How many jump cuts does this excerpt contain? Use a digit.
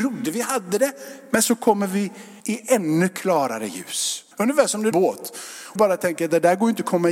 4